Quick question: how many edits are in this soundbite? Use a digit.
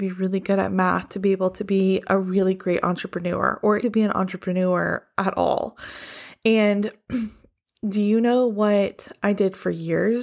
1